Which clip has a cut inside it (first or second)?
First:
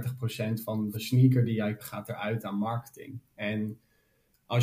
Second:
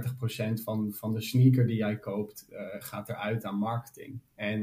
first